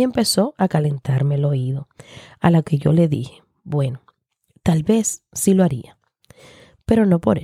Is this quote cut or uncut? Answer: uncut